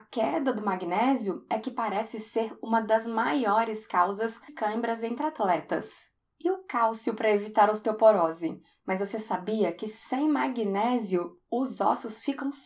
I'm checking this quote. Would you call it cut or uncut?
cut